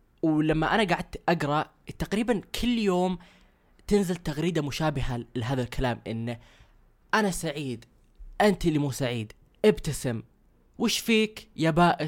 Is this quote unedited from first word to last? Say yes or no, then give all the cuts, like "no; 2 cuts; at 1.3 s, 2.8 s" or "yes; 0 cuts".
yes; 0 cuts